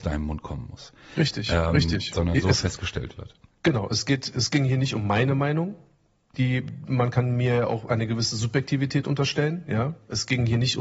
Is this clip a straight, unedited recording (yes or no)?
yes